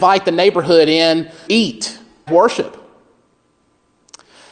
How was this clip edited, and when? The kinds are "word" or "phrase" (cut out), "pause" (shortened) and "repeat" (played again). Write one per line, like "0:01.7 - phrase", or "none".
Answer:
0:01.5 - word
0:02.3 - phrase